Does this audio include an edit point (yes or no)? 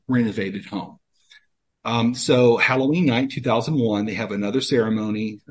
no